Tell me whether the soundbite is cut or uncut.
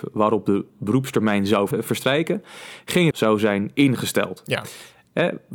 cut